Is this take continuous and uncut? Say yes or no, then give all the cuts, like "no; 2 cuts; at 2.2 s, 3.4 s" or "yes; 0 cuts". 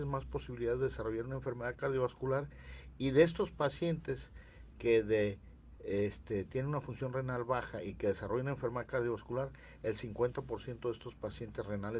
yes; 0 cuts